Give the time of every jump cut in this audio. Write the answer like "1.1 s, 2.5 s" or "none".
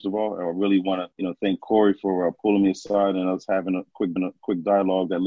1.1 s, 4.2 s